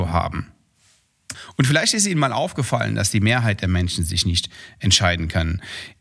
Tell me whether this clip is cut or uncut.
uncut